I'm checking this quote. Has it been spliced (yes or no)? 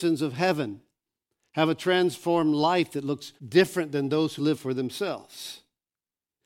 yes